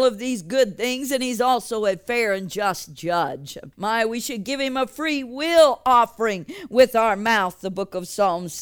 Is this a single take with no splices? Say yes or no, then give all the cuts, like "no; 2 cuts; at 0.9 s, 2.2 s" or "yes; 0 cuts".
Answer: no; 1 cut; at 3.7 s